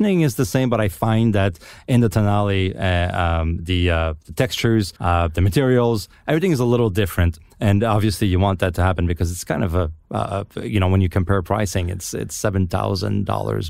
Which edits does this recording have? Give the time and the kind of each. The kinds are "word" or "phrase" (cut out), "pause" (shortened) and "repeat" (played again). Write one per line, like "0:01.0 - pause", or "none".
0:05.0 - pause